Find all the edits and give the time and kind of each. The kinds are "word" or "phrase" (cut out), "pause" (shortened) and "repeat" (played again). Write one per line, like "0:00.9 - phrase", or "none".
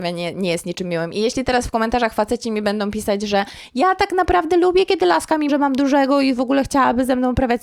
0:05.5 - word